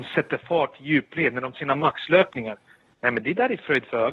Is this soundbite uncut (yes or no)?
no